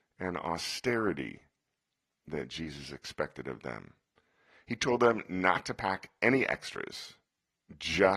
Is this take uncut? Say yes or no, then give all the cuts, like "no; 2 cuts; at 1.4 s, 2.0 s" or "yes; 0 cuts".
yes; 0 cuts